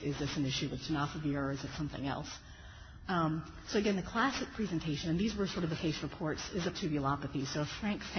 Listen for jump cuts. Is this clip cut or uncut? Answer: cut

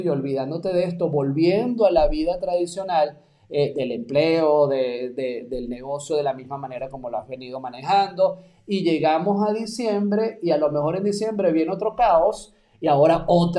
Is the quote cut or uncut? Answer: uncut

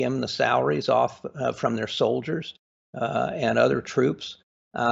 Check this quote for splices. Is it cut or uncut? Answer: uncut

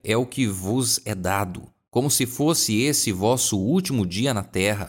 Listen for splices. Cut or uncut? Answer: uncut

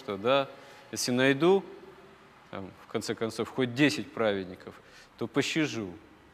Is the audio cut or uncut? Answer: uncut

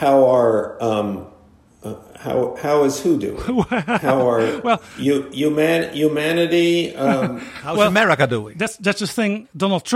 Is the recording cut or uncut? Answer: uncut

